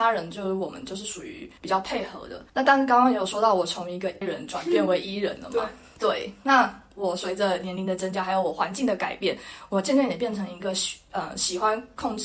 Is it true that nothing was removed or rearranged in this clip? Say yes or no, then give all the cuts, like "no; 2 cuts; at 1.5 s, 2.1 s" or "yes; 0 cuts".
no; 3 cuts; at 1.6 s, 2.5 s, 4.2 s